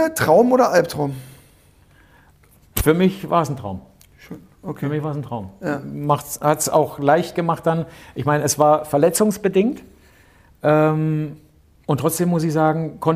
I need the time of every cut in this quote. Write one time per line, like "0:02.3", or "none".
none